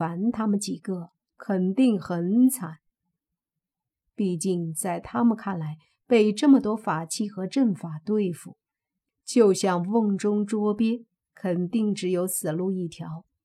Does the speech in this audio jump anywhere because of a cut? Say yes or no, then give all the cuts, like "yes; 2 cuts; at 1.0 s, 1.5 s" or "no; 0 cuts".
no; 0 cuts